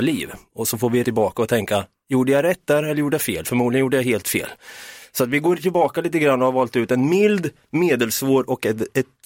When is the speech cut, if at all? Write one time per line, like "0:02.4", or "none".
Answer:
0:01.0